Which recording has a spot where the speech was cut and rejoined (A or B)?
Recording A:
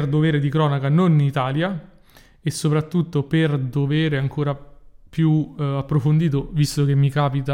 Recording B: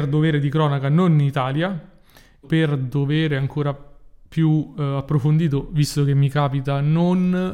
B